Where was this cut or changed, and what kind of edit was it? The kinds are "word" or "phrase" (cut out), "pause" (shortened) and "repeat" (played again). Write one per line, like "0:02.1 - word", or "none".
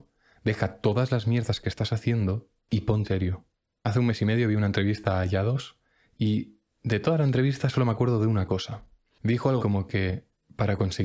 0:03.0 - word
0:09.6 - word